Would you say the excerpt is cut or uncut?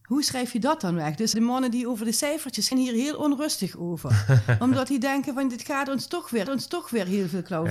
cut